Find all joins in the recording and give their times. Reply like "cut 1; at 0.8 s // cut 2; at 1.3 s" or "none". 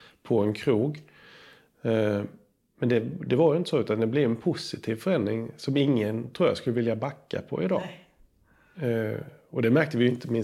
none